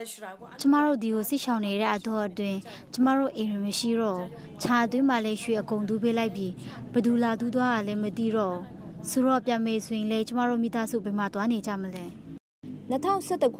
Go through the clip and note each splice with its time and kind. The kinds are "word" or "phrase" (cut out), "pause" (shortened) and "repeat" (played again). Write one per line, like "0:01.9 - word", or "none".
none